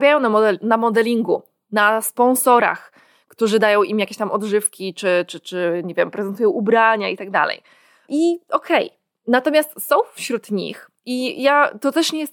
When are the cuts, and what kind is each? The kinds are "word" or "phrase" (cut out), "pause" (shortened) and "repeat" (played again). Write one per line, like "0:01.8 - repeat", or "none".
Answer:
none

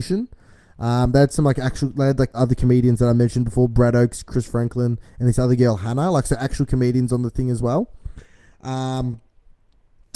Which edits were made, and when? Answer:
0:02.3 - word

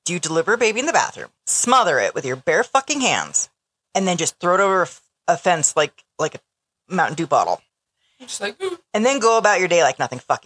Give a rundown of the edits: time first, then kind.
0:01.4 - pause

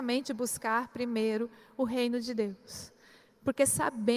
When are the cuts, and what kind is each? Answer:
none

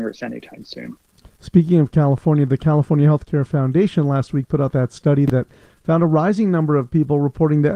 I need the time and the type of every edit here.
none

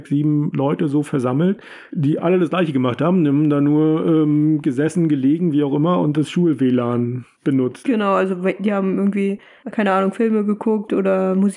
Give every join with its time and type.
none

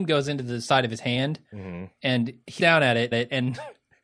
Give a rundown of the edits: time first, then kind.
0:02.6 - word
0:03.1 - repeat

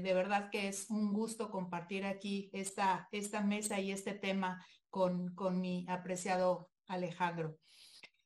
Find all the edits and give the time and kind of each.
none

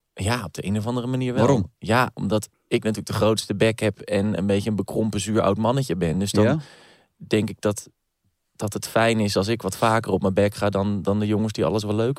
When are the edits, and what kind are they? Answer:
none

